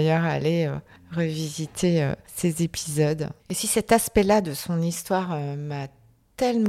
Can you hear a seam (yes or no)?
yes